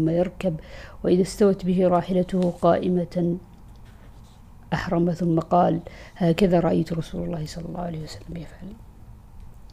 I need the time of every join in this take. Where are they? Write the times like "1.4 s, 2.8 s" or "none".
none